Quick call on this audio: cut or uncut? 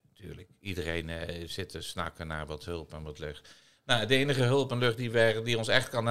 uncut